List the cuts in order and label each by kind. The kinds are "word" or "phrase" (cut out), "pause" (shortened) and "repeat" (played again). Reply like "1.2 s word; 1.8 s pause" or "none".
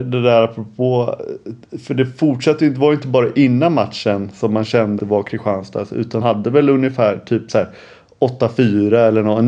5.0 s word; 6.2 s word